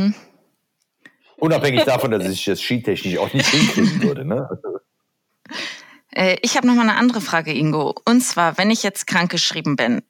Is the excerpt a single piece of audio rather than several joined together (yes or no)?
yes